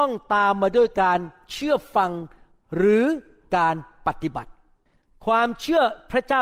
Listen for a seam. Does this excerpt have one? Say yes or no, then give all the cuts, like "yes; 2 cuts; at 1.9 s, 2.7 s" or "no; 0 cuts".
no; 0 cuts